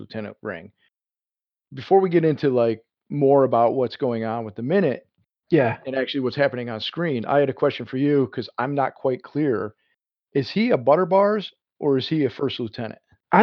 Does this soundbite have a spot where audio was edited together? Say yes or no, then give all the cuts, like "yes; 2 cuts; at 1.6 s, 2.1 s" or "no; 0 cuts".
no; 0 cuts